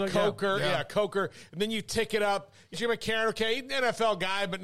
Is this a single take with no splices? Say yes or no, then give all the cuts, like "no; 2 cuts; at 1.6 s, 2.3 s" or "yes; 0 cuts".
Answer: no; 1 cut; at 2.7 s